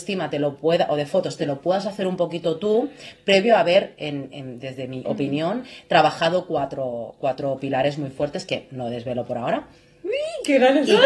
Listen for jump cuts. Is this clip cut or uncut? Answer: cut